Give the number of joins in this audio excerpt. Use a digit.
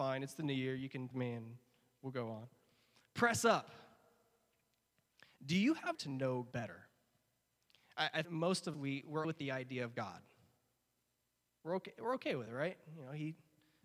6